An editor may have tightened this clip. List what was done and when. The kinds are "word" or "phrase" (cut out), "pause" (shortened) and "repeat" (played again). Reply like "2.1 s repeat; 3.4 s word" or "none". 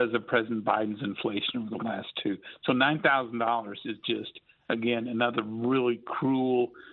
none